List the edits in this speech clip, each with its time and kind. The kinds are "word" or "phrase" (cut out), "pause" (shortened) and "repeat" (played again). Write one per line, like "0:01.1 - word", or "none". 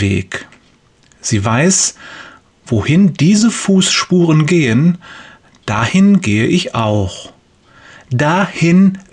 none